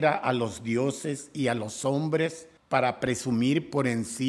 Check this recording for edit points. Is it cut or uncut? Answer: cut